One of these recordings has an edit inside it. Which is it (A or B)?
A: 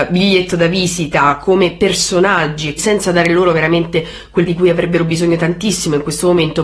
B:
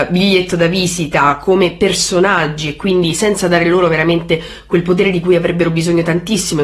A